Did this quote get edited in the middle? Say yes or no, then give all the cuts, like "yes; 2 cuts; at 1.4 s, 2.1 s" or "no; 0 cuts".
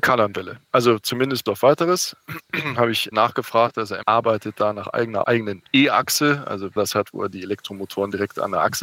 yes; 5 cuts; at 1.5 s, 3.1 s, 4.0 s, 5.2 s, 6.8 s